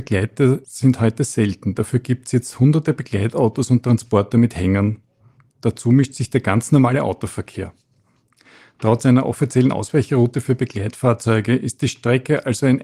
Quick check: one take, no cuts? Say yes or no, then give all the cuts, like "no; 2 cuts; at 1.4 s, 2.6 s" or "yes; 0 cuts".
yes; 0 cuts